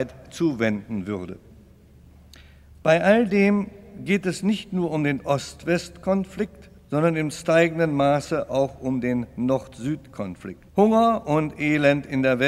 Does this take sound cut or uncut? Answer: cut